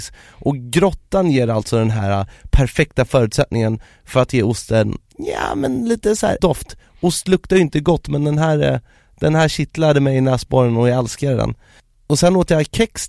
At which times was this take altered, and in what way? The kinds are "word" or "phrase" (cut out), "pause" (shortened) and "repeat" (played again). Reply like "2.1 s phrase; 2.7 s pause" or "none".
6.4 s phrase